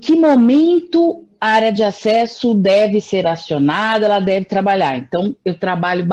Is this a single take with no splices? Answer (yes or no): yes